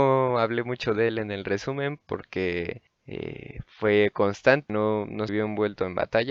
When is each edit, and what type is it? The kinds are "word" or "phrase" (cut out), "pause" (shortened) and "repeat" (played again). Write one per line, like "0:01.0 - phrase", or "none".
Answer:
0:02.9 - pause
0:04.7 - word
0:05.3 - word